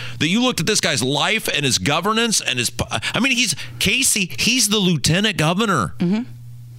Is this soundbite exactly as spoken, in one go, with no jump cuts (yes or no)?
yes